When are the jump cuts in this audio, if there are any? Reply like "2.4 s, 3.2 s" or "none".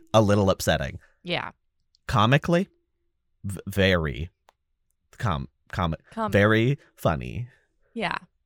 none